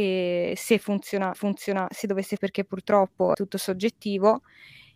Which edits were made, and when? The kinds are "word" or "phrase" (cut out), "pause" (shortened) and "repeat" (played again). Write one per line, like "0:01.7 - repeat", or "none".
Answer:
0:01.3 - repeat
0:02.4 - word
0:03.3 - word